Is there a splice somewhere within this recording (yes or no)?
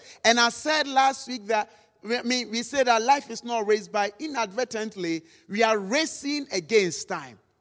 no